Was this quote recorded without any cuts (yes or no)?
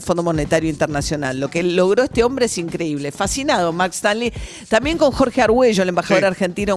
yes